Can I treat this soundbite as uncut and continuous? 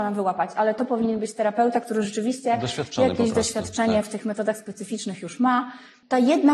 yes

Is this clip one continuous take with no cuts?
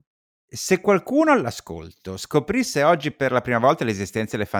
yes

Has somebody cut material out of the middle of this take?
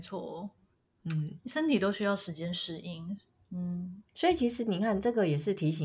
no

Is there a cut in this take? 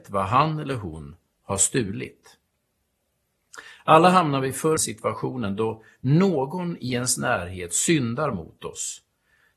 yes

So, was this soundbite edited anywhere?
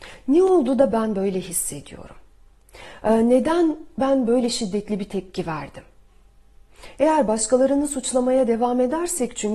no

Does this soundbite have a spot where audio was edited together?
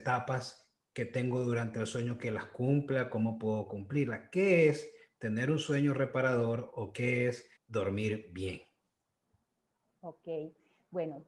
yes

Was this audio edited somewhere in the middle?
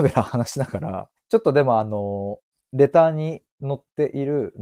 yes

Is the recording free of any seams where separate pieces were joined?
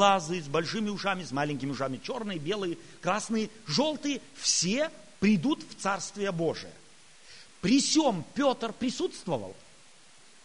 no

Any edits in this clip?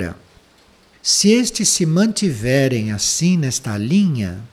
no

